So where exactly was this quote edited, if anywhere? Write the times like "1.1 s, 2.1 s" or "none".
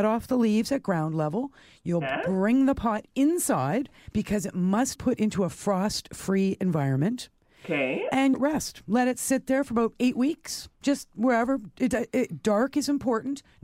5.0 s, 8.3 s, 10.7 s